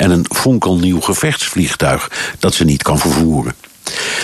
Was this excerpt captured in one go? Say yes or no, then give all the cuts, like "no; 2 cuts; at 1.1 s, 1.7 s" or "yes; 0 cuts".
yes; 0 cuts